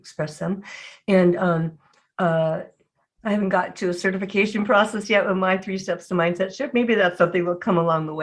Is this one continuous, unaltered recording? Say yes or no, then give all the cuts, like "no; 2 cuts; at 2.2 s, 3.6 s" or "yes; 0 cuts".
yes; 0 cuts